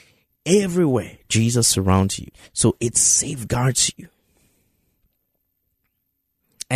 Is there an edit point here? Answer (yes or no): yes